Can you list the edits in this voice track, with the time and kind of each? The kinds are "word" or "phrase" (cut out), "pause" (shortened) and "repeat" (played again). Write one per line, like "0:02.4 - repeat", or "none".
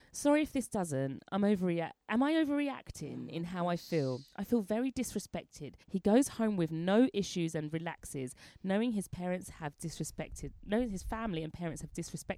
0:05.8 - pause